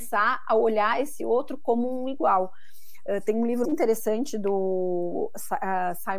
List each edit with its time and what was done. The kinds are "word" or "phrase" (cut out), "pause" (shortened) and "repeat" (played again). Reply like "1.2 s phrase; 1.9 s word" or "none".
3.6 s word

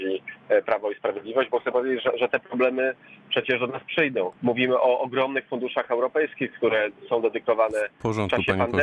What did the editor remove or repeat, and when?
4.4 s pause

